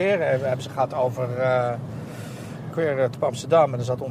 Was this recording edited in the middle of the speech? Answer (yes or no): yes